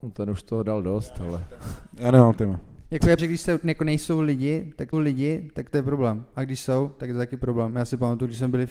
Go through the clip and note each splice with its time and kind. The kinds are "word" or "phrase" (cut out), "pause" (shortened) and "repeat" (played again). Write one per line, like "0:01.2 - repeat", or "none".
0:03.2 - word
0:04.9 - repeat